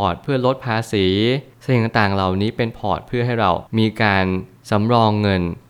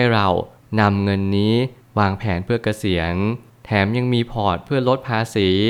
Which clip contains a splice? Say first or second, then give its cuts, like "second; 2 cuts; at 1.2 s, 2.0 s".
first; 1 cut; at 3.7 s